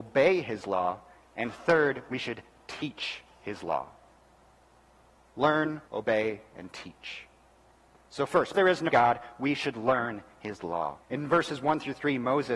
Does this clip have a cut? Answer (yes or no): yes